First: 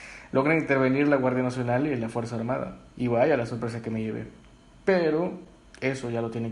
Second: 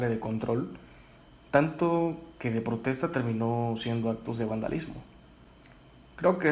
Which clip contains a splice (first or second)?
first